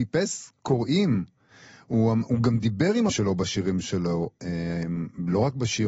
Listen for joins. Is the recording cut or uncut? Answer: cut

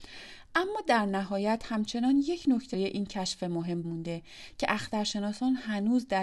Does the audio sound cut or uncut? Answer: cut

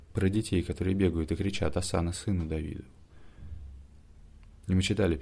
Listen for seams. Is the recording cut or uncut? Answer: uncut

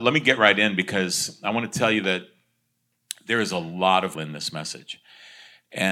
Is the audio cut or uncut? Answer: cut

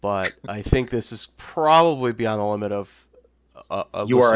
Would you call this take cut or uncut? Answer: uncut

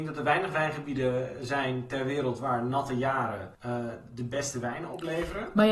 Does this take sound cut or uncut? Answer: cut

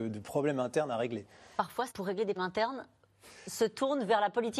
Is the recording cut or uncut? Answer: cut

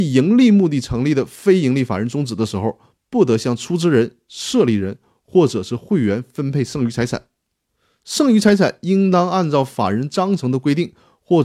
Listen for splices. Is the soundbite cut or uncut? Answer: uncut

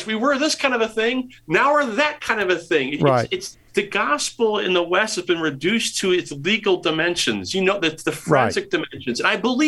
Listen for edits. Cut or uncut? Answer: cut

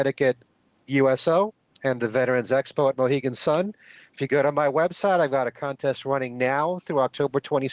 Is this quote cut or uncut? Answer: uncut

